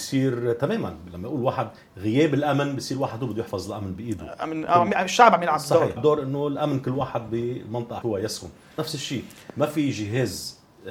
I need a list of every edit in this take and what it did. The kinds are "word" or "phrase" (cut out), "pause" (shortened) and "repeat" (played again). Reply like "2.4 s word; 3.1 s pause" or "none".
6.0 s word; 8.0 s word; 8.8 s word